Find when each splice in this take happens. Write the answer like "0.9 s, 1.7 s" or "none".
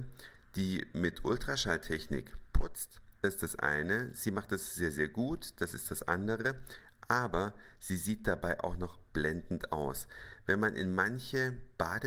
3.2 s